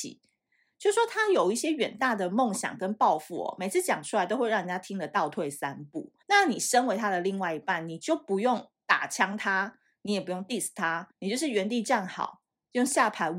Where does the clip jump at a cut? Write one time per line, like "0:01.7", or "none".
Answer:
0:06.2
0:11.1